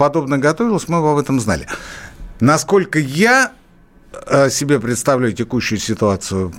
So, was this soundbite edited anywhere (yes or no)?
no